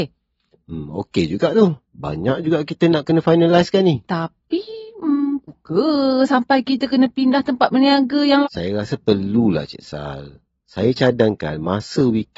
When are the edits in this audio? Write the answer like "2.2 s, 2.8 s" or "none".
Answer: 1.8 s, 5.5 s, 8.4 s